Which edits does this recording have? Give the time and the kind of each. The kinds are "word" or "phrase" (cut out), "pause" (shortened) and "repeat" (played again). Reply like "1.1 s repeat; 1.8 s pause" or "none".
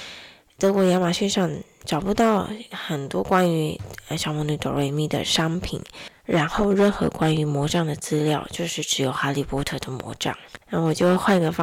10.6 s pause